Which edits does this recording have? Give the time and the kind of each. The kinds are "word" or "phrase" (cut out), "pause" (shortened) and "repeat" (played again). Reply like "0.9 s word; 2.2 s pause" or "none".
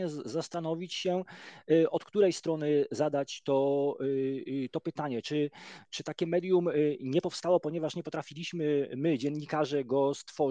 none